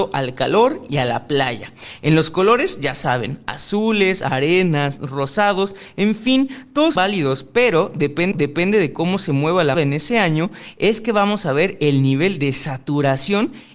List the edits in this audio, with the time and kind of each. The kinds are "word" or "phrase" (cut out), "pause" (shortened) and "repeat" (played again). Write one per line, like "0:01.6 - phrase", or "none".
0:07.0 - word
0:08.3 - repeat
0:09.7 - word

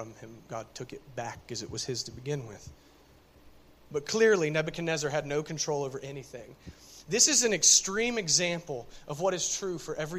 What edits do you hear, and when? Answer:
none

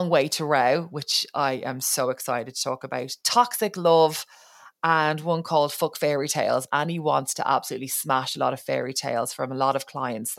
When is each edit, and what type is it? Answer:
0:06.7 - word

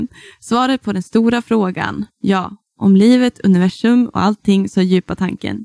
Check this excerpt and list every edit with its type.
none

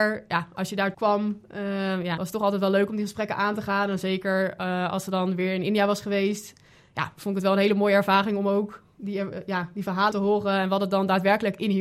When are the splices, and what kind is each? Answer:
0:00.9 - word
0:02.2 - word
0:10.1 - word

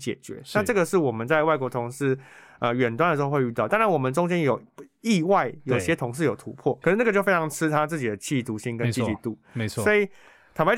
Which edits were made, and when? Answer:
0:06.8 - word

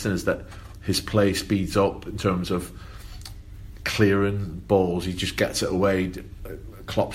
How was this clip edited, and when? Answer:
none

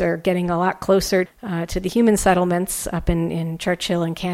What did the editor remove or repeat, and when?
0:01.3 - word

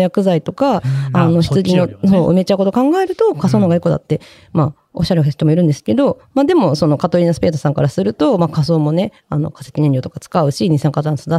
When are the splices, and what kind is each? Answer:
none

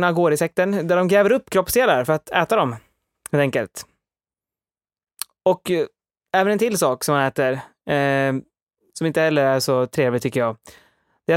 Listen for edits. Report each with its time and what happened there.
none

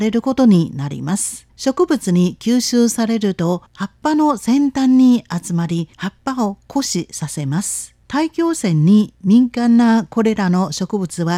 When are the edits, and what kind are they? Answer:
0:01.5 - pause
0:03.7 - pause
0:05.9 - pause
0:08.0 - pause

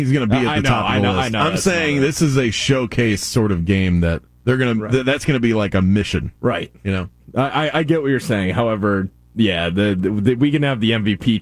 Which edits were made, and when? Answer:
0:04.4 - pause
0:06.4 - pause

